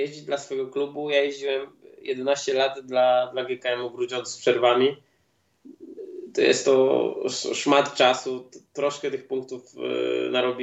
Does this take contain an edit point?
no; 0 cuts

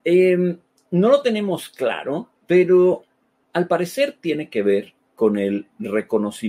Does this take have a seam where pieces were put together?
yes; 1 cut; at 2.4 s

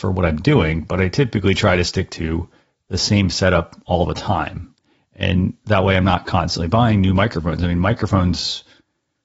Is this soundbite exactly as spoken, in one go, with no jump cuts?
yes; 0 cuts

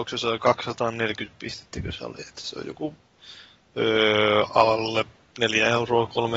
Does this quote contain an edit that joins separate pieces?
no; 0 cuts

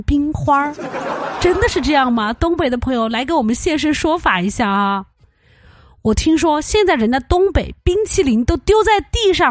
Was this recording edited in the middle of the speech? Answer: no; 0 cuts

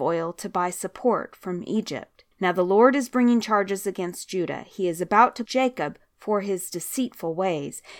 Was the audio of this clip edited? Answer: yes; 2 cuts; at 2.3 s, 5.5 s

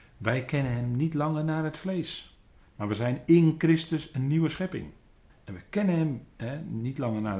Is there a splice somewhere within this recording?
yes; 2 cuts; at 2.6 s, 5.3 s

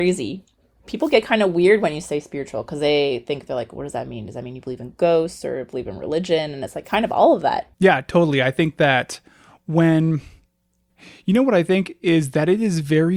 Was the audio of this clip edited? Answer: yes; 1 cut; at 7.7 s

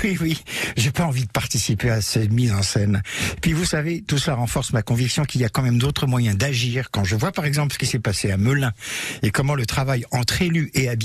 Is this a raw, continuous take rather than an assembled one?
yes; 0 cuts

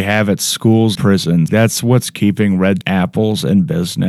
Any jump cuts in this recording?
yes; 3 cuts; at 0.9 s, 1.5 s, 2.8 s

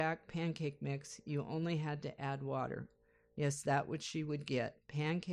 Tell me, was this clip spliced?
no; 0 cuts

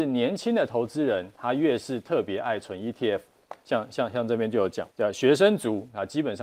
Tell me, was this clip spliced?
yes; 1 cut; at 4.9 s

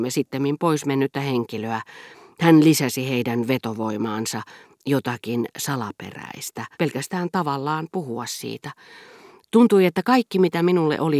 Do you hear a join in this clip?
yes; 1 cut; at 6.7 s

